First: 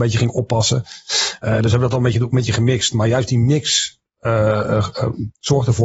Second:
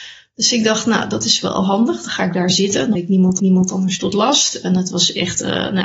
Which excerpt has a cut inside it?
second; 2 cuts; at 2.9 s, 3.4 s

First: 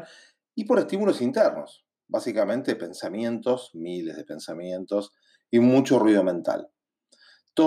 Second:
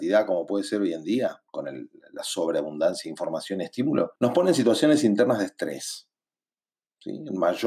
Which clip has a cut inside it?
second; 2 cuts; at 1.5 s, 4.2 s

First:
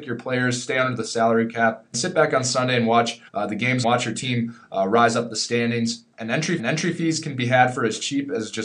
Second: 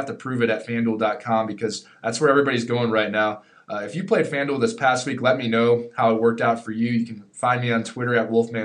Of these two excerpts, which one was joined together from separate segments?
first; 4 cuts; at 1.9 s, 3.3 s, 3.8 s, 6.6 s

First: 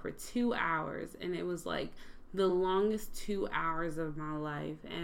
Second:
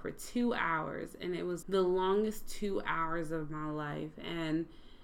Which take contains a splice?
second; 1 cut; at 1.6 s

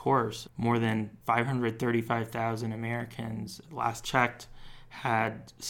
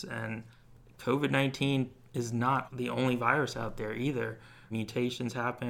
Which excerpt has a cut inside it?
first; 2 cuts; at 1.2 s, 4.0 s

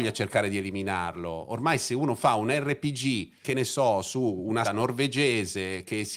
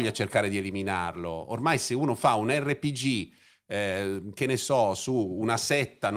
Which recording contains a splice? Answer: first; 2 cuts; at 3.4 s, 4.6 s

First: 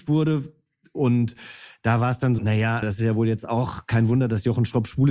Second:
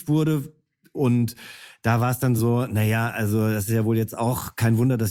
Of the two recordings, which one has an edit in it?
first; 2 cuts; at 2.4 s, 2.8 s

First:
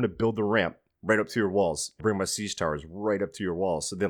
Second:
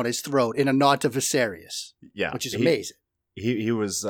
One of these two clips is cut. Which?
first; 1 cut; at 2.0 s

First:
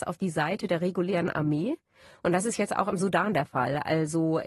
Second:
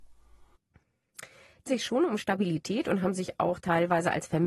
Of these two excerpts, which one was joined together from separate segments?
second; 1 cut; at 1.7 s

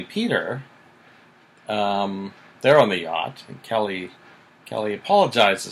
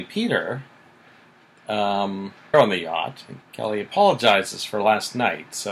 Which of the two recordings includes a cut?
second; 2 cuts; at 2.5 s, 3.4 s

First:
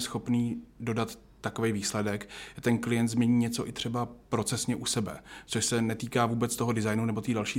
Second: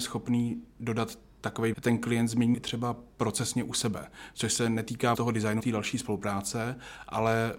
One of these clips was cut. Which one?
second; 4 cuts; at 1.7 s, 2.5 s, 5.1 s, 5.6 s

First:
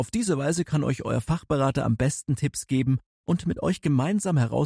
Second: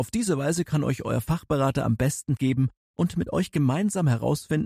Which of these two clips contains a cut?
second; 1 cut; at 2.4 s

